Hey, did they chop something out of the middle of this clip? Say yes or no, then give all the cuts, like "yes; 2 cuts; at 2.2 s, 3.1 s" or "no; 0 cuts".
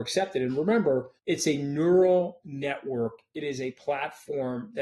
yes; 1 cut; at 1.2 s